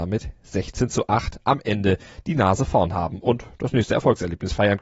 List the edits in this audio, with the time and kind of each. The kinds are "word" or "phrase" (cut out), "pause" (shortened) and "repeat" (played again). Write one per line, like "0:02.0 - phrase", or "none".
none

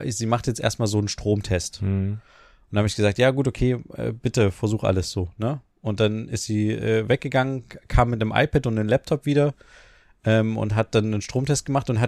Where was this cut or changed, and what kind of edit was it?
none

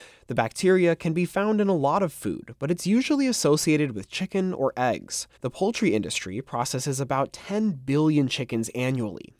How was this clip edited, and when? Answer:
0:05.4 - pause

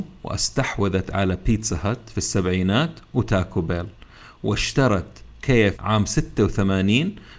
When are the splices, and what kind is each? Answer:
0:05.7 - word

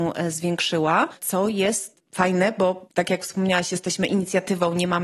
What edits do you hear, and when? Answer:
none

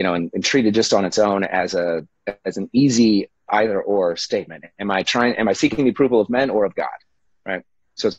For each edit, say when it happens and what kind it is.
0:03.5 - word

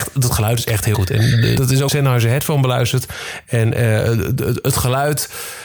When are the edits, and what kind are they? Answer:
0:00.9 - word
0:01.6 - word
0:01.9 - phrase

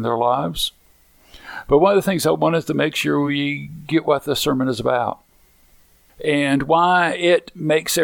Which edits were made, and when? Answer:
none

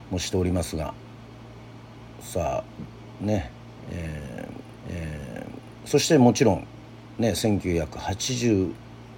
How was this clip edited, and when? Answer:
0:04.8 - repeat

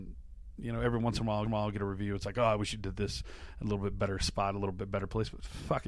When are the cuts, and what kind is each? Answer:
0:01.5 - repeat

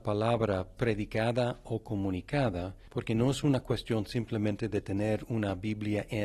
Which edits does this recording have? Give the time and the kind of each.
none

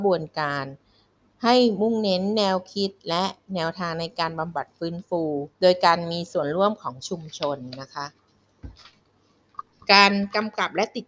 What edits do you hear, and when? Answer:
0:05.5 - pause

